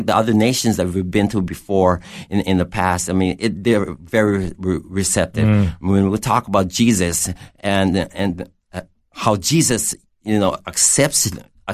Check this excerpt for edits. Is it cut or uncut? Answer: uncut